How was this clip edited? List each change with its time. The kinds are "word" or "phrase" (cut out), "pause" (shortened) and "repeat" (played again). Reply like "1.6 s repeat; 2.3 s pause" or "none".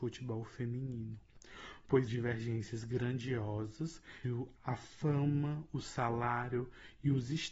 2.1 s word; 4.2 s word; 4.6 s pause